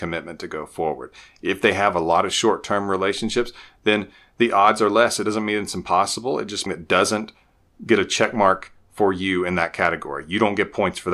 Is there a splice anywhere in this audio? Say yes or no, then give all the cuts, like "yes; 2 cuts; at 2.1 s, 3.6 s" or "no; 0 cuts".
yes; 1 cut; at 6.7 s